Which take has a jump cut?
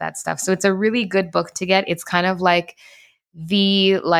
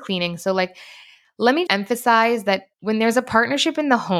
second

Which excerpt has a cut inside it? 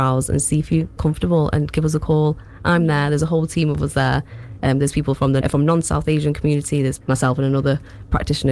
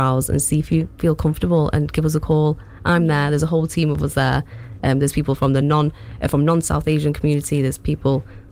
first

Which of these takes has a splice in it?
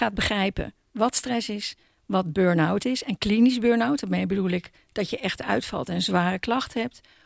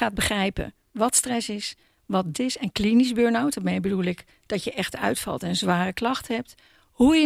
second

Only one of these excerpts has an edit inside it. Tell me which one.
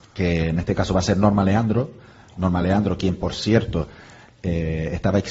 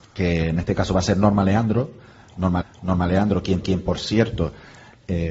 second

